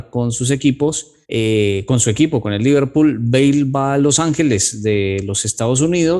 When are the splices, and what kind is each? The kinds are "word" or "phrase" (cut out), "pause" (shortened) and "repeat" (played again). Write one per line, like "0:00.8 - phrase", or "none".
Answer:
0:01.2 - pause